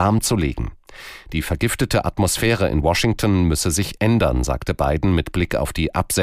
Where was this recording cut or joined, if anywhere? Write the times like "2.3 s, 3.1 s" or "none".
none